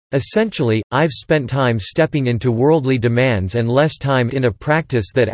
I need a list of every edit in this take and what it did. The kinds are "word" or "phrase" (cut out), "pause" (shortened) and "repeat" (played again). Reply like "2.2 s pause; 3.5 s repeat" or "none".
1.5 s word; 4.3 s word